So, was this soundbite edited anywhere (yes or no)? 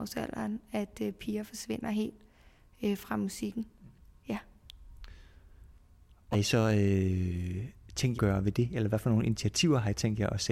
yes